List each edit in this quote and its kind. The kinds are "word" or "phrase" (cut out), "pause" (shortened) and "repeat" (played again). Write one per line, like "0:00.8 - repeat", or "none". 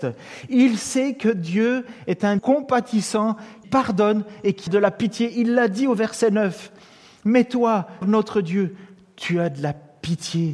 0:02.4 - word
0:03.6 - word
0:04.7 - word
0:08.0 - word